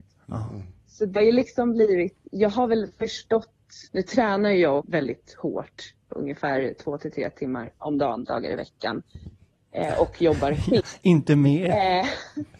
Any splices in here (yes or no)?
yes